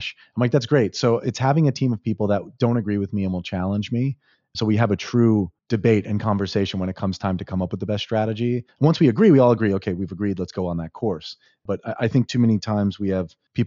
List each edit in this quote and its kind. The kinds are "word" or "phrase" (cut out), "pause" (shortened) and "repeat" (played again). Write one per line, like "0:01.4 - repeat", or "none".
none